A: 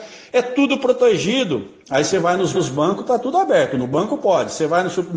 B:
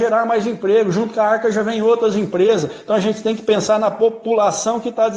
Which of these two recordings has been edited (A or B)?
A